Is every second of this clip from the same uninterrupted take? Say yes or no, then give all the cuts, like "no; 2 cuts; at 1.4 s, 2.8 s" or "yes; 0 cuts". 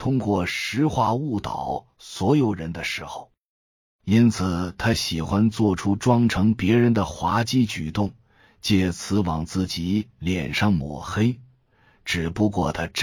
yes; 0 cuts